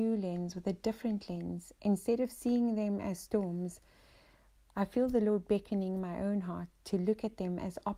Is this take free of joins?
yes; 0 cuts

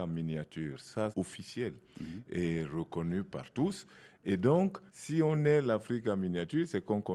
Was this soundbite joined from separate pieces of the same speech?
yes; 2 cuts; at 1.1 s, 4.9 s

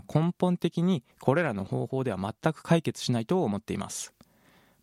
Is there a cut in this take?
yes; 1 cut; at 1.1 s

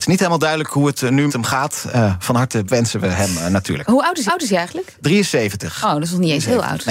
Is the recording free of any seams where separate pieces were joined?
no; 3 cuts; at 1.3 s, 2.7 s, 4.3 s

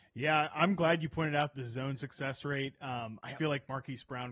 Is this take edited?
yes; 2 cuts; at 1.5 s, 3.4 s

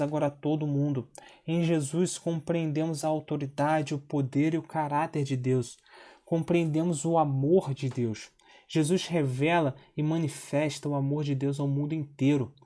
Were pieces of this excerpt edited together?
no; 0 cuts

